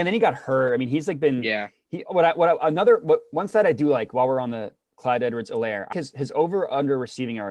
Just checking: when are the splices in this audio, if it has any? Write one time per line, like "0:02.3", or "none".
0:02.1
0:05.9

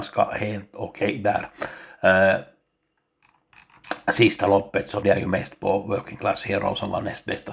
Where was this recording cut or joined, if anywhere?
0:05.0

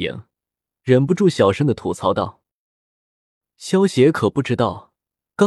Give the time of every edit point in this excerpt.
none

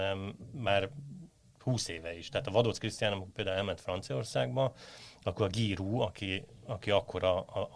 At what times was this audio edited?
none

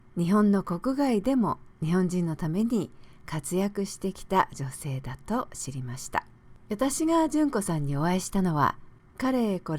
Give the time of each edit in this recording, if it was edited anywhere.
0:01.7
0:06.6

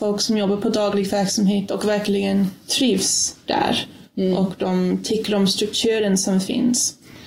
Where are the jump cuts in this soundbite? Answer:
none

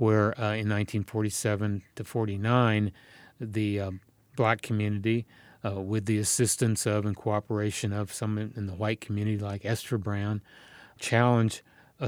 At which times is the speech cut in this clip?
none

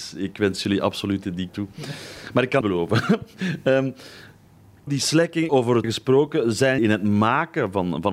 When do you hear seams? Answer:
0:01.5
0:02.6
0:04.9
0:05.5
0:05.8
0:06.8

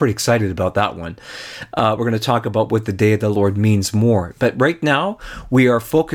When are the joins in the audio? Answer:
none

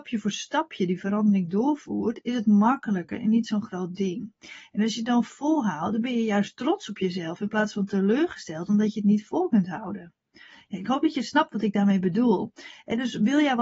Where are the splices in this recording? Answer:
none

